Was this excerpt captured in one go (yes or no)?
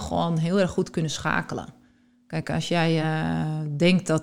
yes